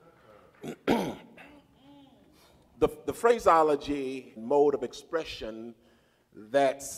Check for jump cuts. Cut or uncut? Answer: cut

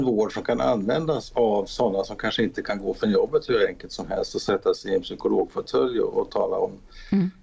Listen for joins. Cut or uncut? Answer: uncut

